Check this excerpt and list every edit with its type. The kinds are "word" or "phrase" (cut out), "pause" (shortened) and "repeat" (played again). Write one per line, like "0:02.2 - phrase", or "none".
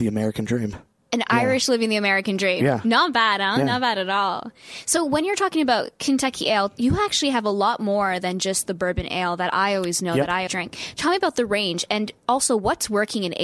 0:10.5 - word

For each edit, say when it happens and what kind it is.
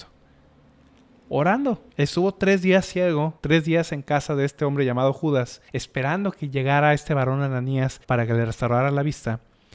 0:01.9 - pause
0:03.4 - pause
0:05.7 - pause
0:08.0 - pause

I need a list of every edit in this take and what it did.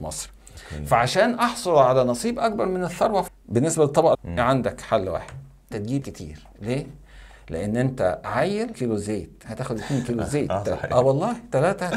0:03.3 - word
0:04.1 - word
0:05.7 - word
0:06.0 - word
0:08.7 - word
0:09.5 - word

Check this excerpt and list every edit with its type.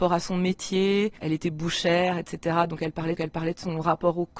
0:03.2 - repeat

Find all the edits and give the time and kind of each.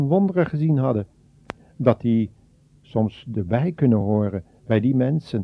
none

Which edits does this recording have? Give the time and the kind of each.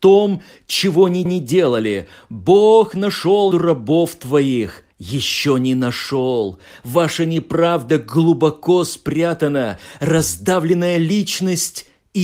0:01.3 - repeat
0:03.5 - word
0:04.9 - pause

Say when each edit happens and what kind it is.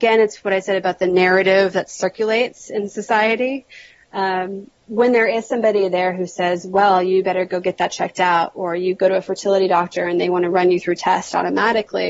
0:04.8 - pause

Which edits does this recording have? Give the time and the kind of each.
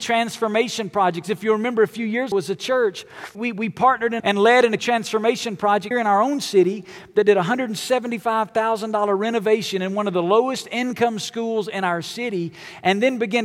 0:02.3 - word
0:03.3 - word
0:04.2 - word
0:04.8 - word
0:05.9 - word

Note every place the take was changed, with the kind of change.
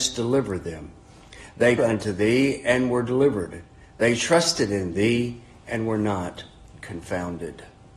0:01.8 - word

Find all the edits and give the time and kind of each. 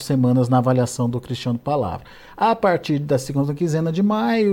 none

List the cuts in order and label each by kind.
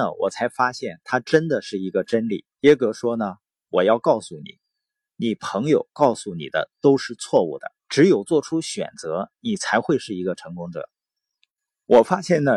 0:02.5 - pause
0:07.8 - pause

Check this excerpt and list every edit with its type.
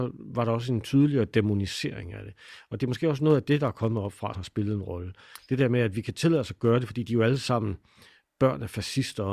0:04.3 - word

